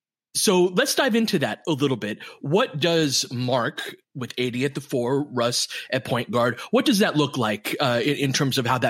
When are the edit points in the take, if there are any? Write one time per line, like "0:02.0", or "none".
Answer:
0:04.0